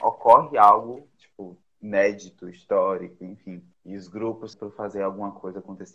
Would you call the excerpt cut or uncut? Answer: cut